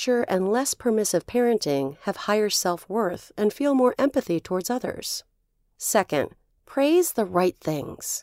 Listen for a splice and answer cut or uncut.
uncut